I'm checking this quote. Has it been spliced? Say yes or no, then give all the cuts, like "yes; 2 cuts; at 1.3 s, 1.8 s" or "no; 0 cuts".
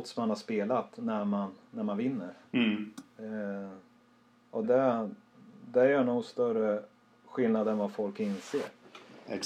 yes; 1 cut; at 4.6 s